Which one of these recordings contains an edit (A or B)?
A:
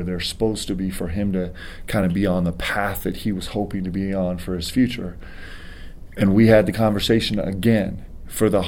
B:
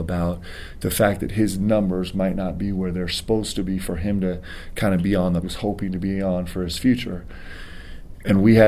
B